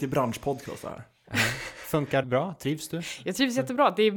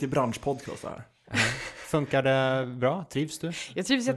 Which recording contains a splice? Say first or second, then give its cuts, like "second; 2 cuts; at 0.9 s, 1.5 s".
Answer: first; 1 cut; at 2.2 s